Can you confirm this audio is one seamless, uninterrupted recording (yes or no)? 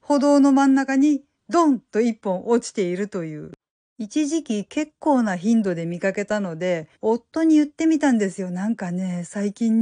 no